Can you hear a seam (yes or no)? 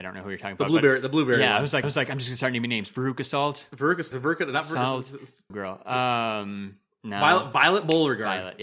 yes